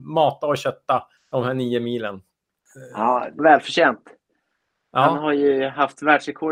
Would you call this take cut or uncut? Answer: cut